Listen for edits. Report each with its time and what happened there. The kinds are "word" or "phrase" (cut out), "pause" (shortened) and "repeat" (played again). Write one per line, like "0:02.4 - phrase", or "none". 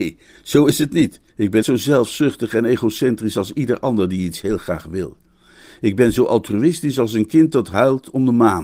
0:01.3 - pause
0:01.6 - word